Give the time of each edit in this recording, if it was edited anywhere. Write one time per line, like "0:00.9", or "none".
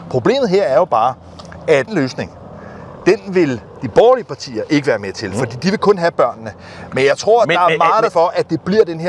0:01.9
0:08.1